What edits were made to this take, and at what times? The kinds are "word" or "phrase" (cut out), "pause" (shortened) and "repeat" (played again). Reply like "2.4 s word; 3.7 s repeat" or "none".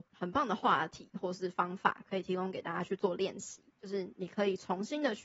3.7 s pause